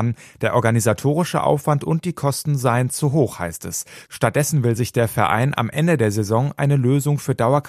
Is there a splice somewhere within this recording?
no; 0 cuts

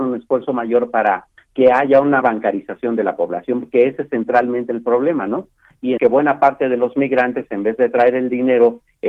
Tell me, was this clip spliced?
yes; 2 cuts; at 2.2 s, 6.0 s

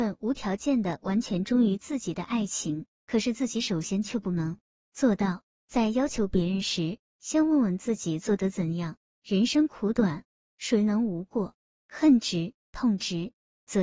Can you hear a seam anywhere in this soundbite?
yes; 1 cut; at 12.6 s

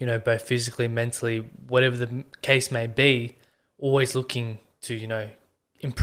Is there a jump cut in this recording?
no; 0 cuts

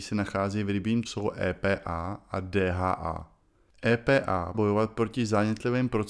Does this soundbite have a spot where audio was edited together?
yes; 2 cuts; at 1.0 s, 4.5 s

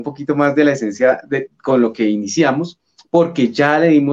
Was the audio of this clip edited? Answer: no; 0 cuts

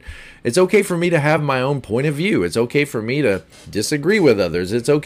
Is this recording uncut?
yes; 0 cuts

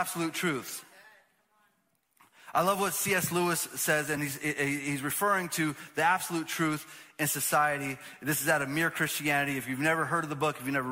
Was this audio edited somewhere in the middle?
no; 0 cuts

